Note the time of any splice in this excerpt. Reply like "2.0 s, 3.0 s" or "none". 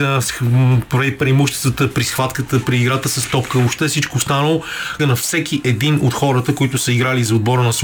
5.0 s